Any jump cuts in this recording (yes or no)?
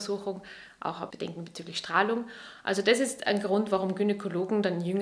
yes